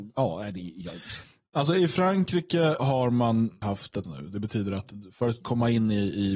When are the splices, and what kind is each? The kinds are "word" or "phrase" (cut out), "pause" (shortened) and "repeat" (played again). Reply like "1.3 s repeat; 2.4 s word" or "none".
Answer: 2.8 s word; 3.6 s phrase; 4.0 s word